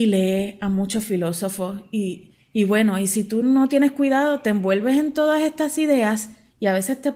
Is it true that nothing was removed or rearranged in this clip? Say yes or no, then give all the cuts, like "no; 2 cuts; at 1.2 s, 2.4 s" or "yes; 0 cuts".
yes; 0 cuts